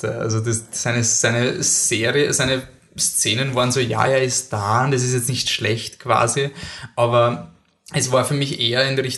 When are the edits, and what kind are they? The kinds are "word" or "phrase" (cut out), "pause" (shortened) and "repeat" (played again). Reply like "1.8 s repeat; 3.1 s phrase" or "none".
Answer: none